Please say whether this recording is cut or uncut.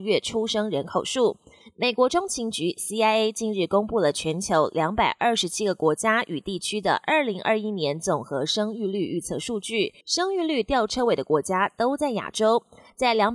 cut